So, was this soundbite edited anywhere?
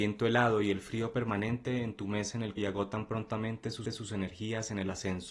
yes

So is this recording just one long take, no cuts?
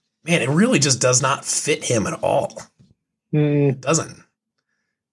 yes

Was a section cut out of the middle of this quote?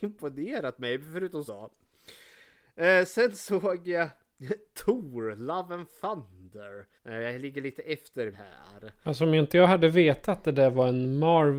yes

